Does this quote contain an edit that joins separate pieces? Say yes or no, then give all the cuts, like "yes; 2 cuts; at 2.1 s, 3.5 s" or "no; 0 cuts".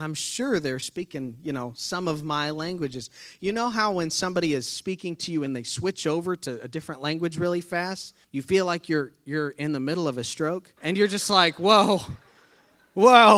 yes; 3 cuts; at 5.5 s, 8.2 s, 10.8 s